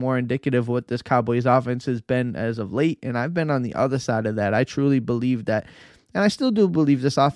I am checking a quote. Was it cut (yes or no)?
no